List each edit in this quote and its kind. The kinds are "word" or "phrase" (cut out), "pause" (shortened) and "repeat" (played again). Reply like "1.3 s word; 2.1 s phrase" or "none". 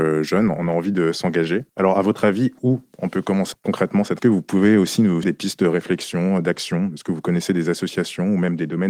1.7 s pause; 3.5 s word; 4.2 s phrase; 5.2 s word